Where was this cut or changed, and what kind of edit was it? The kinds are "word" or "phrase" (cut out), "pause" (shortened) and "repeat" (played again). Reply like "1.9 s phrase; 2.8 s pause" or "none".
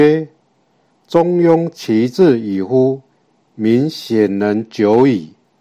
none